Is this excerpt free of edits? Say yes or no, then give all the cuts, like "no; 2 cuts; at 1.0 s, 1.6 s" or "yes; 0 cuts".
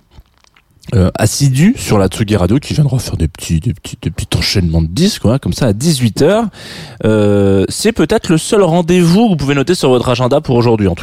yes; 0 cuts